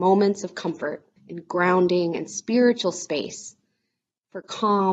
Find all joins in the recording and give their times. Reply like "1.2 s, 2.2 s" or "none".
1.2 s